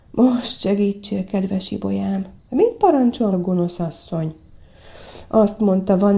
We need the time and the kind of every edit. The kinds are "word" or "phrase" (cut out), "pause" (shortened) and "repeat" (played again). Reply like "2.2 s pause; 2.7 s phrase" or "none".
2.4 s pause; 3.3 s phrase